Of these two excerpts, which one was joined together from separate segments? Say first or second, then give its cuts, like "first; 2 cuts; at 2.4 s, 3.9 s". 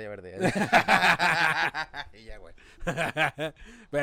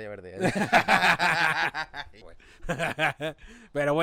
second; 1 cut; at 2.2 s